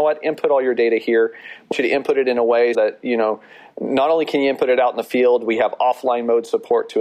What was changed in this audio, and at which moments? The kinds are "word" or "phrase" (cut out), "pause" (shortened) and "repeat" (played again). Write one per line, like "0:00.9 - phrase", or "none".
0:01.7 - word
0:02.7 - word